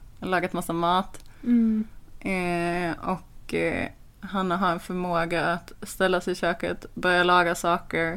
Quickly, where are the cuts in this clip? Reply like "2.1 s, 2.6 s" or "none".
none